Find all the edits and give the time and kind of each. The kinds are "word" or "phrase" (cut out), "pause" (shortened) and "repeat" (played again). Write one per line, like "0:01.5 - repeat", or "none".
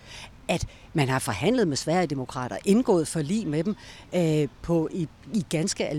none